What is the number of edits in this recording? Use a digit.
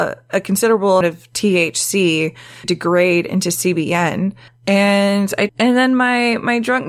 4